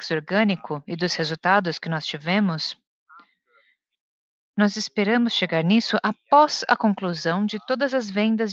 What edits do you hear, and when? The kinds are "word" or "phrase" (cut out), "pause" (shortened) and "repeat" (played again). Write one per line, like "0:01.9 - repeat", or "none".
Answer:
none